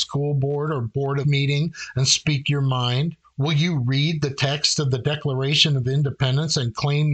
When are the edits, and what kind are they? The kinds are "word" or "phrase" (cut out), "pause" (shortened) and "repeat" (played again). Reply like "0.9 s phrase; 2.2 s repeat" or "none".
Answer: 1.2 s phrase; 3.2 s pause